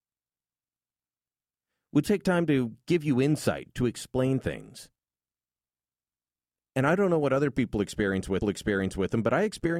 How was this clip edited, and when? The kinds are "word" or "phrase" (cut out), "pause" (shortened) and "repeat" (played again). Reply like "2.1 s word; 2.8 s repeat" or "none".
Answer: 2.0 s word; 8.4 s repeat